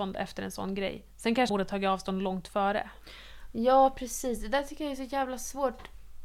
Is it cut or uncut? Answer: cut